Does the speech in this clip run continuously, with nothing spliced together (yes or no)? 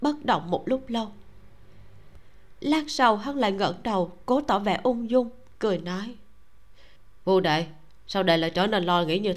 yes